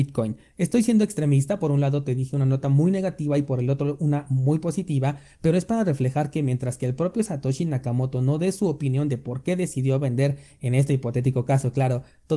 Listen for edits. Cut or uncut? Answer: uncut